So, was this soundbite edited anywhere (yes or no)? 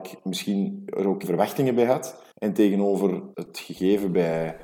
yes